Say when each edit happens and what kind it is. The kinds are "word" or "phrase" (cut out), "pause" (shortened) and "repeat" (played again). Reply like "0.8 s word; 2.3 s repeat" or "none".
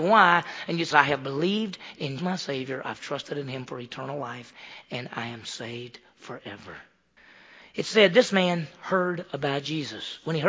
0.9 s word; 2.2 s phrase; 7.2 s pause